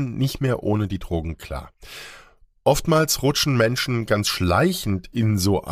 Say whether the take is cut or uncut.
uncut